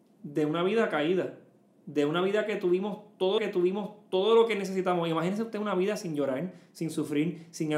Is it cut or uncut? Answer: cut